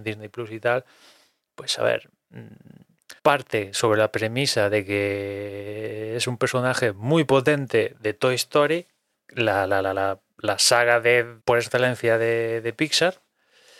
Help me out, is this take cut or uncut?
cut